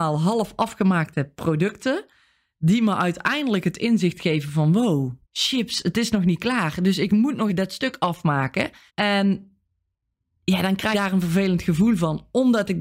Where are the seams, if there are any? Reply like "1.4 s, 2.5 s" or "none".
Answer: 5.2 s, 7.5 s, 8.9 s, 10.9 s